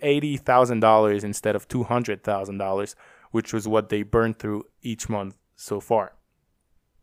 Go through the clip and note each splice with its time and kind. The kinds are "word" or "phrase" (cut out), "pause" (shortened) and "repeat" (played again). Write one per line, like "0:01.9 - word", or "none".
none